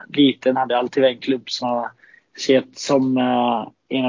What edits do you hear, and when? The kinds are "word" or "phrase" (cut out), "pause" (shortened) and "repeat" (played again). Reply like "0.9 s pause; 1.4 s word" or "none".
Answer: 1.6 s word